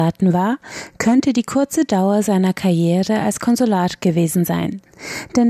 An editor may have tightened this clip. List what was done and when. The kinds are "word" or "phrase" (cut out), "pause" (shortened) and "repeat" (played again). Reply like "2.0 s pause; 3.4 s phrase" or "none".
none

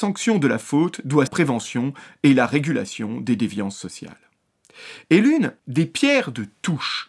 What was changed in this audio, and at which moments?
1.3 s phrase; 5.6 s pause

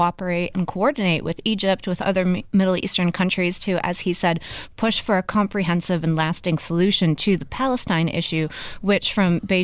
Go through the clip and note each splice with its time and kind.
none

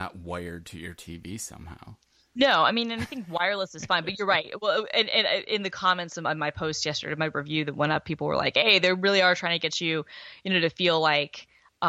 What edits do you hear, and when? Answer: none

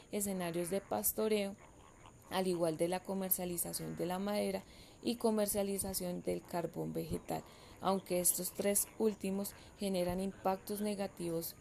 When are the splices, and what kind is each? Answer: none

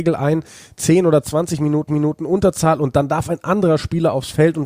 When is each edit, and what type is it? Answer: 1.9 s repeat

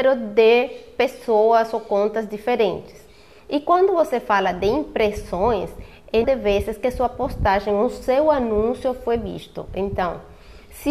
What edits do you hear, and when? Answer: 6.2 s word

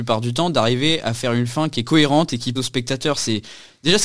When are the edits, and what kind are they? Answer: 2.6 s word

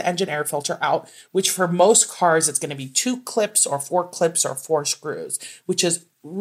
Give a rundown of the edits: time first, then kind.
none

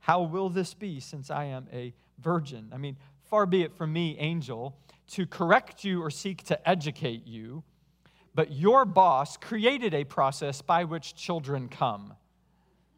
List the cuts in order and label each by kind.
none

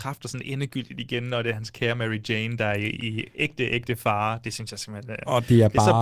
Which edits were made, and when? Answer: none

